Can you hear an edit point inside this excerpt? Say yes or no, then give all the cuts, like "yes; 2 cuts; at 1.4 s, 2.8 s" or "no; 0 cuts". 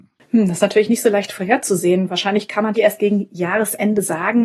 yes; 1 cut; at 2.8 s